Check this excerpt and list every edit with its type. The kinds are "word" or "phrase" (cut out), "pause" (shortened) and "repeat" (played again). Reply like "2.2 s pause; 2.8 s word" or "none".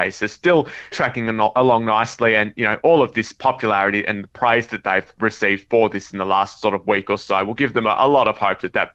0.9 s word